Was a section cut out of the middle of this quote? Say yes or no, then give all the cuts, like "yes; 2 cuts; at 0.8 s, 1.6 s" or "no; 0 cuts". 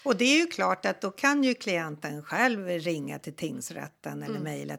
no; 0 cuts